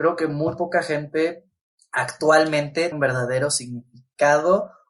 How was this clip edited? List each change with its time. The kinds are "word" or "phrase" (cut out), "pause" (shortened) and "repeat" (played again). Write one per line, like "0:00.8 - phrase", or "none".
0:02.9 - word